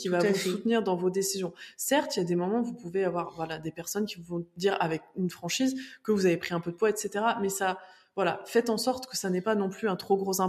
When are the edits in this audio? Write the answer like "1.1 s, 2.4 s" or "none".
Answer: none